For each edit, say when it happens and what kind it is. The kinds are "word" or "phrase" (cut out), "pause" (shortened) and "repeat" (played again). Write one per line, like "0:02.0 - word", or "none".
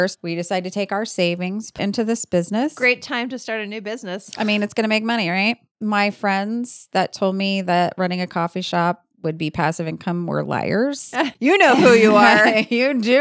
0:01.8 - word